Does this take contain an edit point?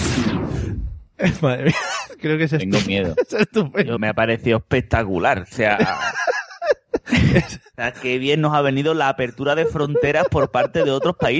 yes; 1 cut; at 4.0 s

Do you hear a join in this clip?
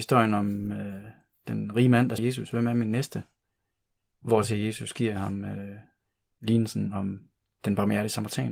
yes; 1 cut; at 2.2 s

